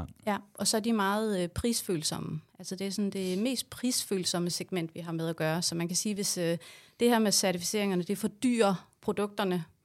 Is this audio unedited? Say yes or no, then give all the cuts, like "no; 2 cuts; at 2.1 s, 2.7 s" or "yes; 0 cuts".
yes; 0 cuts